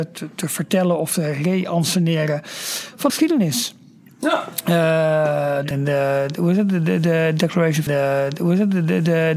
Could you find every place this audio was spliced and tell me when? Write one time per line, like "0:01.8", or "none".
0:03.1
0:05.7
0:07.9